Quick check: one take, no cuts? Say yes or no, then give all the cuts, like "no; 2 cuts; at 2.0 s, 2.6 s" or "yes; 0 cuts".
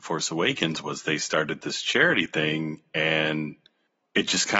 yes; 0 cuts